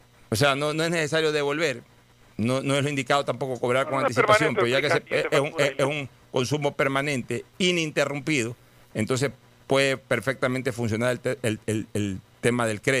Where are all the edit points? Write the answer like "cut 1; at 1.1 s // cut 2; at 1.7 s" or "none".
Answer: none